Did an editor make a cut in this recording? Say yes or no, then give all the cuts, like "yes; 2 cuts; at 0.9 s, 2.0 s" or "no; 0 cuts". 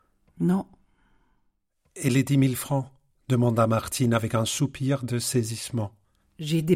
no; 0 cuts